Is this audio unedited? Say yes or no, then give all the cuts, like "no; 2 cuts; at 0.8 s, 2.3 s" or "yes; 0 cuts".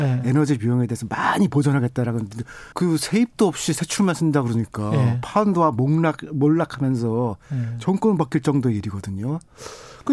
no; 1 cut; at 2.7 s